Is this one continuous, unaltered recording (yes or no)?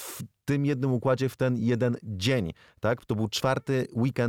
yes